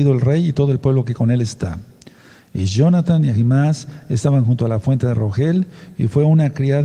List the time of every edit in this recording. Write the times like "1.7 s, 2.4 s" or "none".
none